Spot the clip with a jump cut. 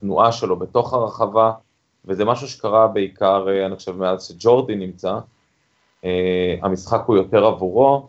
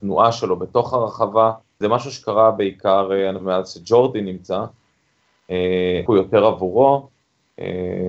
second; 3 cuts; at 1.8 s, 3.4 s, 6.1 s

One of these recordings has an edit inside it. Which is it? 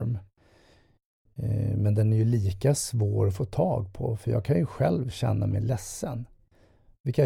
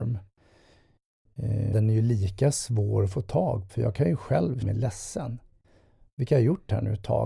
second; 3 cuts; at 1.7 s, 3.7 s, 4.6 s

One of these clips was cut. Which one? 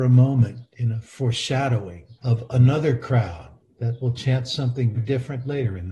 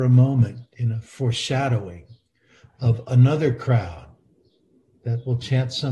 first; 3 cuts; at 2.2 s, 3.6 s, 4.9 s

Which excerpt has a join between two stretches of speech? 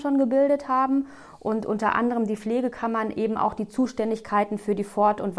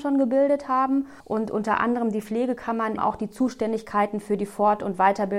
second; 2 cuts; at 1.2 s, 3.0 s

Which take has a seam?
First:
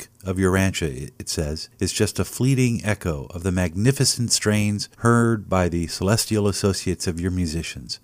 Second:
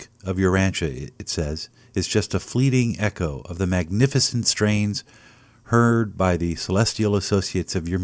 first; 2 cuts; at 1.7 s, 4.9 s

